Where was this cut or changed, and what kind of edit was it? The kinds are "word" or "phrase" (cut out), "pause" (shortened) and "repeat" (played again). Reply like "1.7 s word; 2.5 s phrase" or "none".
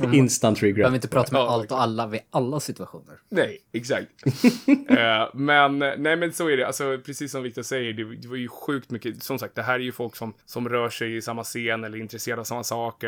10.4 s pause

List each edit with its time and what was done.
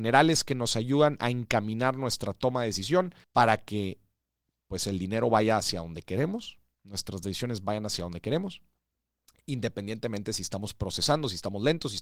3.2 s pause; 4.2 s pause

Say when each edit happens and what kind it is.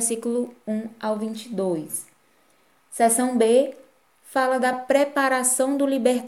none

